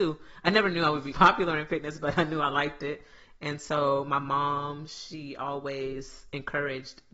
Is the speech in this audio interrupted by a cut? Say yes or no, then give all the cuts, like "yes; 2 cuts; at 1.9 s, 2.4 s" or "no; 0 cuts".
yes; 1 cut; at 1.1 s